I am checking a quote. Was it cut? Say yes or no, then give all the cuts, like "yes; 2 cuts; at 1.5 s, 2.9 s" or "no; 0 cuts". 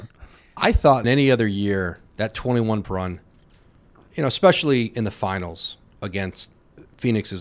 yes; 3 cuts; at 1.0 s, 2.0 s, 2.8 s